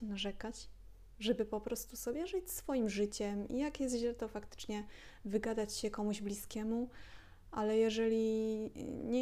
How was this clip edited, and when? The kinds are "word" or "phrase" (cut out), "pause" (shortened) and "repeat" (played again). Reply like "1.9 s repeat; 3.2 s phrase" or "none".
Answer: none